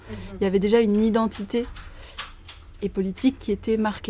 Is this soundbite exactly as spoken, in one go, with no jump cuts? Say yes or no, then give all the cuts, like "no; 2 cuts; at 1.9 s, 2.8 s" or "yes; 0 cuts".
no; 1 cut; at 2.8 s